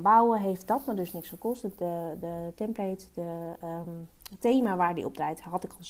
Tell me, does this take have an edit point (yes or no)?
no